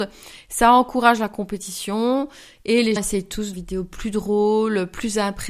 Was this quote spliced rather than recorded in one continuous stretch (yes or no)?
yes